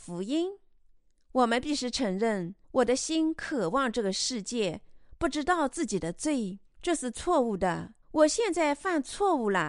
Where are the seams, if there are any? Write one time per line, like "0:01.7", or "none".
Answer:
0:02.6
0:06.7
0:08.0